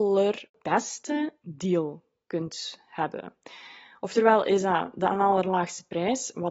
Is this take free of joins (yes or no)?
yes